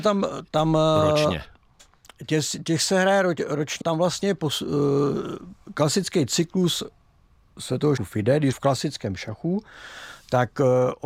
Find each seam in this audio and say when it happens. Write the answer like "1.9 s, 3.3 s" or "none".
3.8 s, 8.0 s, 8.5 s